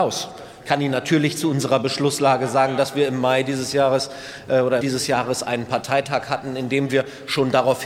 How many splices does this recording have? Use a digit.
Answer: 1